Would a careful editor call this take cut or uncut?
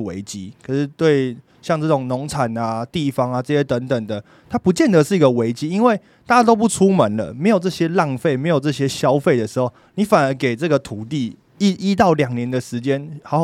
uncut